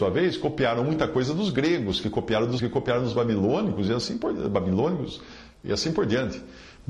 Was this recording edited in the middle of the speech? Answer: yes; 1 cut; at 2.6 s

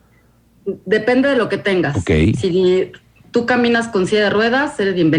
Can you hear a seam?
no; 0 cuts

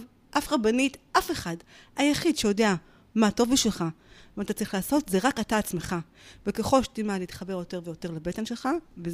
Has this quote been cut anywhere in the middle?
no; 0 cuts

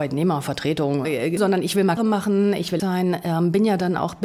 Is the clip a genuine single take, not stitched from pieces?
no; 4 cuts; at 1.0 s, 1.4 s, 2.0 s, 2.8 s

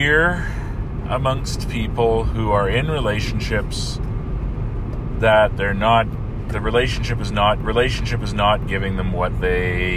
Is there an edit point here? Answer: yes; 1 cut; at 7.6 s

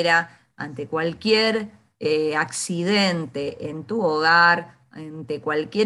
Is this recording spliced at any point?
no; 0 cuts

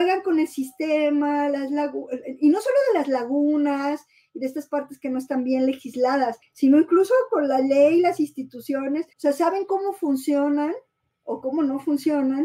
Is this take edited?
yes; 1 cut; at 9.1 s

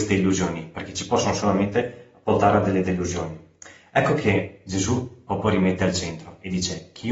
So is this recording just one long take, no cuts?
yes; 0 cuts

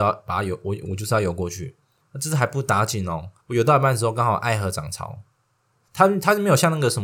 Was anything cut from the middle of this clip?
yes; 3 cuts; at 2.0 s, 3.4 s, 5.8 s

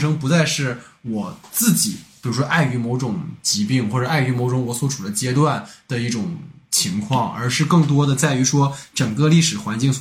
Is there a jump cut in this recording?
no; 0 cuts

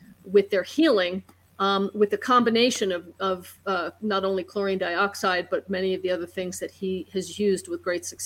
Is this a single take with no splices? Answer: yes; 0 cuts

